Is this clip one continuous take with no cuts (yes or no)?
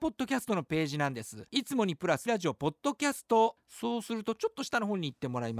no